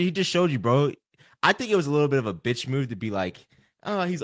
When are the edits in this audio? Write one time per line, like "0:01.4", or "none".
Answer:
none